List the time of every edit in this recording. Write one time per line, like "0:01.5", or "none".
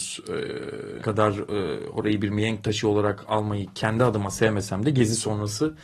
0:01.0